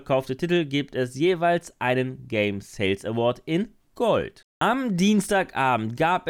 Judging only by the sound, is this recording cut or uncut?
cut